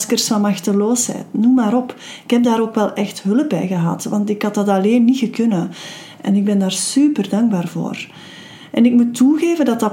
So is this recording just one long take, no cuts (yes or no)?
yes